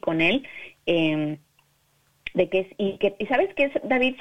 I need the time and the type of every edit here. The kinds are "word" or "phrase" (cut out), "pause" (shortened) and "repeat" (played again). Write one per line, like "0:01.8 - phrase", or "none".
none